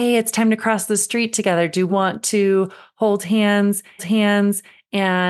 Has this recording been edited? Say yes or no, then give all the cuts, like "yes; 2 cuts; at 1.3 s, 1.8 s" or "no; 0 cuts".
yes; 2 cuts; at 1.9 s, 4.0 s